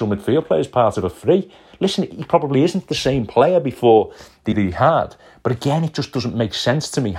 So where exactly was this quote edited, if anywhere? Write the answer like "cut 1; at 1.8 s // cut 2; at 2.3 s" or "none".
cut 1; at 4.5 s